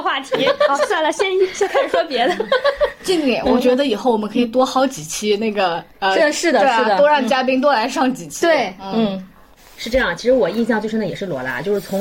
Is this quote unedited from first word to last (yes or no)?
yes